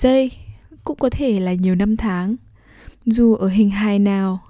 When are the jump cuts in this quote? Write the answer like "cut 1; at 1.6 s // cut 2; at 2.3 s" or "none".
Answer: cut 1; at 2.9 s